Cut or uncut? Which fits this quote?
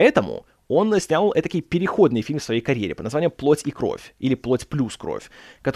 uncut